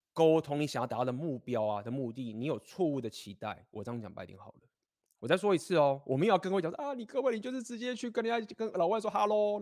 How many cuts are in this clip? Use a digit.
0